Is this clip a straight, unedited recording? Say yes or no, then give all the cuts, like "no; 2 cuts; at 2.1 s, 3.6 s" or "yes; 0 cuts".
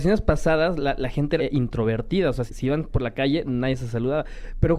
no; 2 cuts; at 1.4 s, 2.5 s